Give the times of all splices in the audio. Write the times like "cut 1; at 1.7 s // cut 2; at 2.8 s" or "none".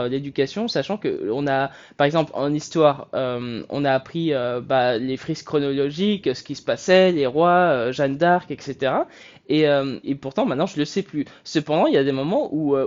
cut 1; at 10.0 s